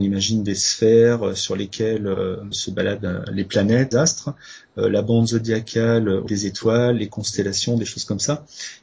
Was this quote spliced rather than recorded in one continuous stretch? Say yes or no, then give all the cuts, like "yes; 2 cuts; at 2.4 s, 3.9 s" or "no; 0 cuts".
yes; 3 cuts; at 2.5 s, 3.9 s, 6.3 s